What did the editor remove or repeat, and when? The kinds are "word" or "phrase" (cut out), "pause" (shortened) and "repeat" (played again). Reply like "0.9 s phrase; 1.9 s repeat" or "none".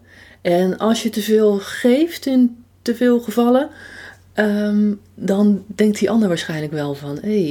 none